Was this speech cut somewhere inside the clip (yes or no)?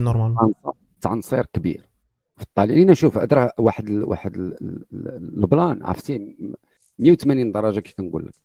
no